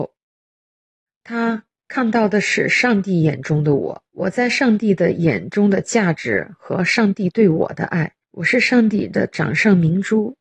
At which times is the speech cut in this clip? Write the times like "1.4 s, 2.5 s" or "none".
4.1 s, 8.2 s